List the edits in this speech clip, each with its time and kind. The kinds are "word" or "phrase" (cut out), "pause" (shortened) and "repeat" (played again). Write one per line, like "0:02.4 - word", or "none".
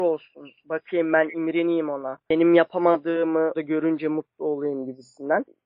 0:03.5 - word

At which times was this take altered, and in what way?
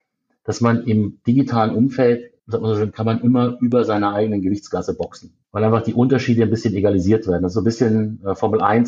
0:02.4 - pause
0:05.4 - pause

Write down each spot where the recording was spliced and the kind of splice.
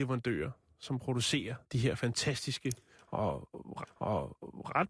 0:01.6 - pause
0:03.8 - repeat

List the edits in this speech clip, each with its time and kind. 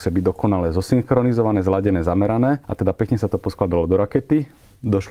0:02.6 - pause

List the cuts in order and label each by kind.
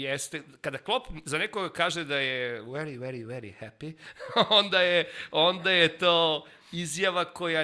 none

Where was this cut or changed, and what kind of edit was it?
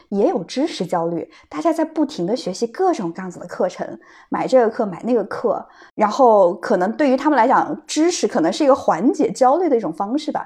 0:05.9 - pause

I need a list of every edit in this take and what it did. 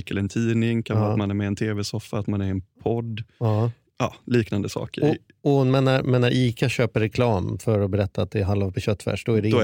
0:08.7 - word

